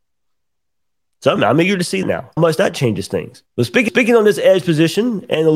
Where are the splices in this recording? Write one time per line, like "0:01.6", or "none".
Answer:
0:01.4
0:02.0
0:02.4
0:03.5
0:03.9